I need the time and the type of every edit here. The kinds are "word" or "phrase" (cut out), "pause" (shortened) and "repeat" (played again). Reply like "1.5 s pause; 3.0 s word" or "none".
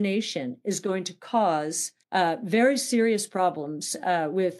2.0 s pause